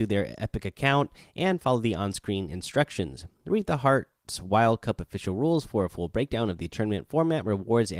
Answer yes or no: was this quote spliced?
no